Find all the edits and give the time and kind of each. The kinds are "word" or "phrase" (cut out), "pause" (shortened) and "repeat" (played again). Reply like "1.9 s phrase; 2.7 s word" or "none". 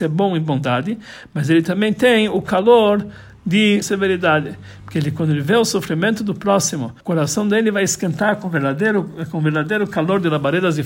3.8 s phrase; 7.0 s pause